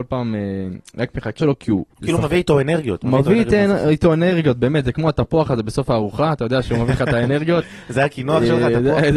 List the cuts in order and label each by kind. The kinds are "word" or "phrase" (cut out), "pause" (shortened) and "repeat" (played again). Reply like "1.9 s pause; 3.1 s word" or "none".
1.4 s word; 1.9 s pause